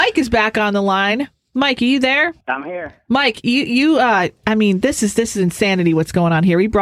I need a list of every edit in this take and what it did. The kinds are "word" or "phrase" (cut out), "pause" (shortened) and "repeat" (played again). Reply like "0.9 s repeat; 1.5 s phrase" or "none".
2.4 s pause